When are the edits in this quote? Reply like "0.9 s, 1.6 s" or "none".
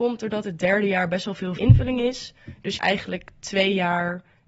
1.6 s, 2.8 s